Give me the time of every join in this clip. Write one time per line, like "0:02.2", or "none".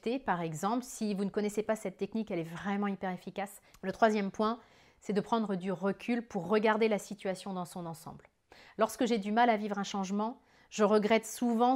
none